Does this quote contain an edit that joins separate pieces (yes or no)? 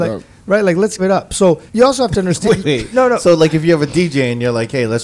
yes